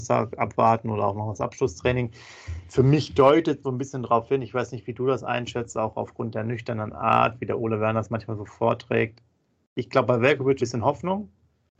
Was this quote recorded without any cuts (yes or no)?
no